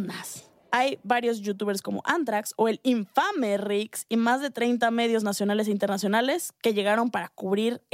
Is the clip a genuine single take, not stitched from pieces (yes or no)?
yes